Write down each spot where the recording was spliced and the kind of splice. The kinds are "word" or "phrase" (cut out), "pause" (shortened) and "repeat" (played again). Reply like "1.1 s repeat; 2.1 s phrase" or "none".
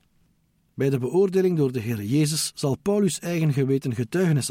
none